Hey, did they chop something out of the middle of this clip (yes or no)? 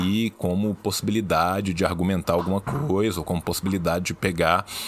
no